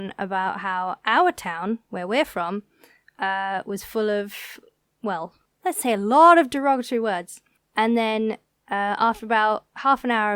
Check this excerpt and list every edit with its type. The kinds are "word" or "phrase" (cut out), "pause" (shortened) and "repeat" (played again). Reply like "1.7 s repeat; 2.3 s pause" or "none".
none